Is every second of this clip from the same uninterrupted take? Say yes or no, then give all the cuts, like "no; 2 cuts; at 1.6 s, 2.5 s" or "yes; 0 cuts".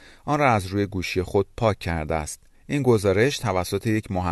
yes; 0 cuts